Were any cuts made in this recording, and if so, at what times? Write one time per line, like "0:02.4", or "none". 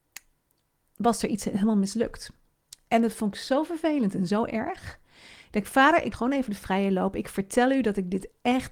0:06.1